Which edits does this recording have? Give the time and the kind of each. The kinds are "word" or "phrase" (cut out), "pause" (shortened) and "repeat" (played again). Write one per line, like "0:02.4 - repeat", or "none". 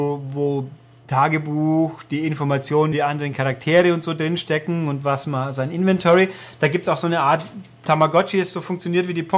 0:02.9 - word